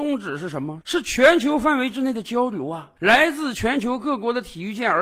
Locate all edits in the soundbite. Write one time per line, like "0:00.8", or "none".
0:03.0